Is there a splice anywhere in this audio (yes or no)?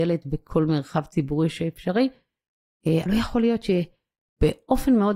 yes